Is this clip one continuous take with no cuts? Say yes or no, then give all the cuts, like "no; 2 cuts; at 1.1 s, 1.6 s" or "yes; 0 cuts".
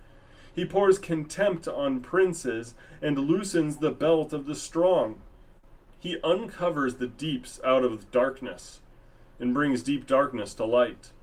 yes; 0 cuts